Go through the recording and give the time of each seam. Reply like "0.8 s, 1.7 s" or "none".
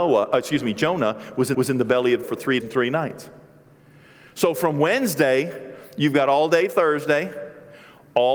1.5 s, 2.2 s, 2.6 s